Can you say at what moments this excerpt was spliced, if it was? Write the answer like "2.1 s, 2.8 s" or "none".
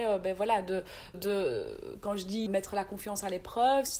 1.1 s, 2.5 s